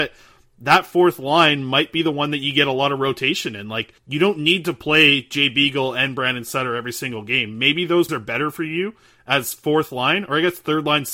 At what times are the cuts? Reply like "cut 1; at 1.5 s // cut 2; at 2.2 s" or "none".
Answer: cut 1; at 4.0 s // cut 2; at 8.1 s